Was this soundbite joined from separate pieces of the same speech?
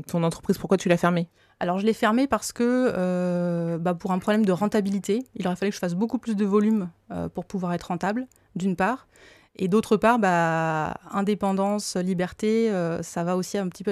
no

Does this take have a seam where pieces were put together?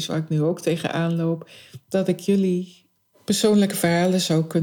no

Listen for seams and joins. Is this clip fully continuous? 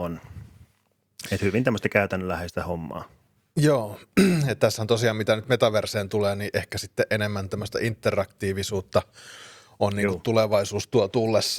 yes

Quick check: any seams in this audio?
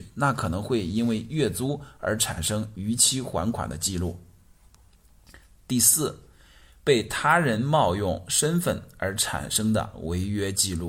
no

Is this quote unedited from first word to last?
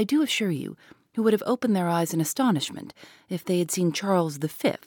yes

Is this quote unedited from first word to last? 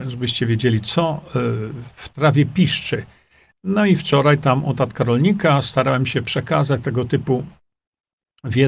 yes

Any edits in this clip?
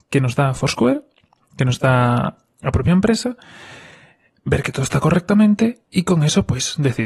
no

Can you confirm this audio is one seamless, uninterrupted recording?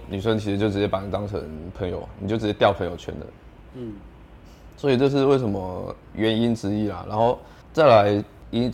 no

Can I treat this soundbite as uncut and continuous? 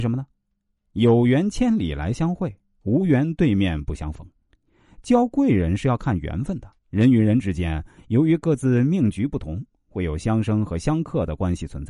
no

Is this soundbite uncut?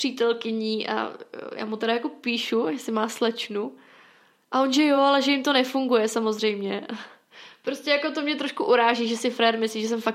yes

